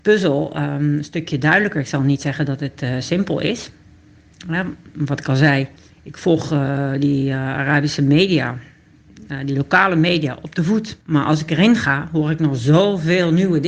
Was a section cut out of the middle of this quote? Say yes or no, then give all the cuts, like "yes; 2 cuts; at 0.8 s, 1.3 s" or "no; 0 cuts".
yes; 2 cuts; at 5.8 s, 11.0 s